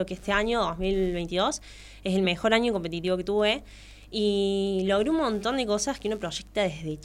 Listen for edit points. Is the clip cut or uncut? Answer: uncut